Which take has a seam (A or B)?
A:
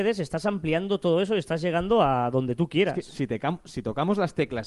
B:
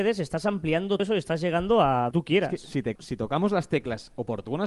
B